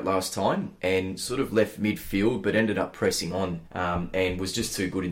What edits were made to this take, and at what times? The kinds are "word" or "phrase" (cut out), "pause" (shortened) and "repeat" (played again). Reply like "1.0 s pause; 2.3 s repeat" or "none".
3.7 s pause